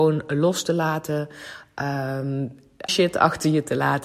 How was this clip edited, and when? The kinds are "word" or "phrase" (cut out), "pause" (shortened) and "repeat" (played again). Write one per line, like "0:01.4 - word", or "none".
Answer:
0:02.9 - word

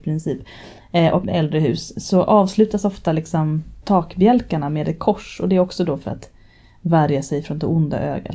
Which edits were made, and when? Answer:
0:01.2 - word
0:03.8 - word

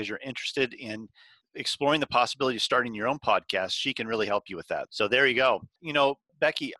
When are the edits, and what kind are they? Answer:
0:04.9 - word

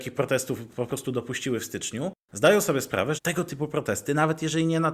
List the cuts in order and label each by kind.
0:03.2 - word

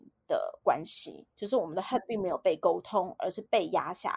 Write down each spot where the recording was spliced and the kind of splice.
0:01.3 - pause

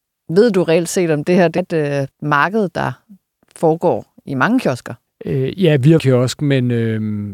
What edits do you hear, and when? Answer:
0:01.6 - word
0:02.1 - pause
0:06.0 - phrase

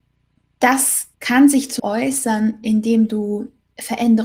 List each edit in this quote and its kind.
0:01.1 - pause
0:01.8 - word

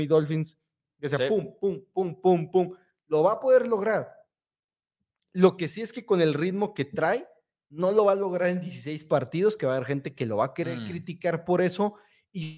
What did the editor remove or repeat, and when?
none

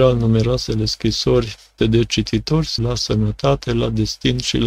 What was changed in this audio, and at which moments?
0:01.8 - word
0:02.8 - word

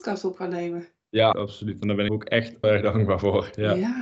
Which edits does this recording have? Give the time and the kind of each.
0:01.3 - word
0:02.1 - phrase
0:02.6 - word

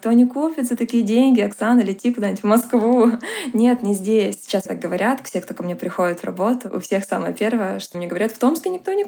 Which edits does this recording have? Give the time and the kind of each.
0:04.7 - word
0:07.9 - word

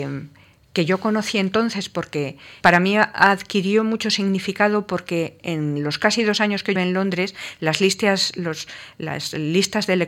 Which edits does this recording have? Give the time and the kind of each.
0:02.6 - word
0:05.4 - word
0:06.8 - word

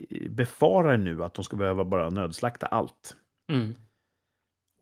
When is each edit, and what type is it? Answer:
none

